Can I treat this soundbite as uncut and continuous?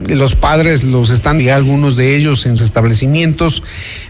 no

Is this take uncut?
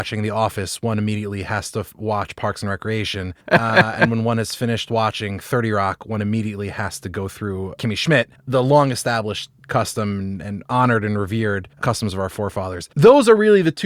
no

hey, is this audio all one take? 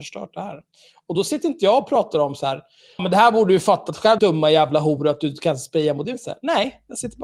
no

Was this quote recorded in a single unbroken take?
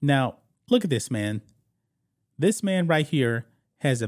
yes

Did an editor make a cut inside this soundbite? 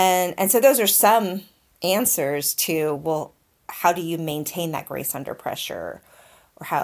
no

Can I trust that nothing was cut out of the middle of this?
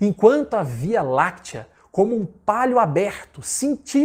yes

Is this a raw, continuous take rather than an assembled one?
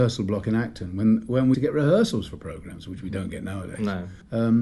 no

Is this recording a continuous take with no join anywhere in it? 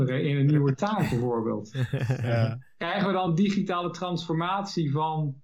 yes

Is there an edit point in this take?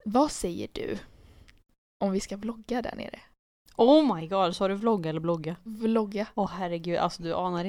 no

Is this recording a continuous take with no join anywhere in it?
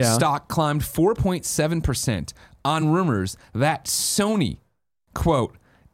yes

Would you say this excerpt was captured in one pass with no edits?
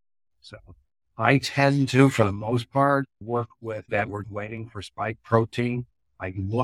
no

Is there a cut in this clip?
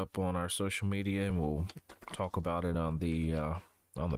no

